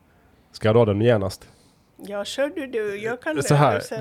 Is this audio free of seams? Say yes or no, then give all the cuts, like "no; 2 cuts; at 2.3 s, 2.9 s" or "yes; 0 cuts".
yes; 0 cuts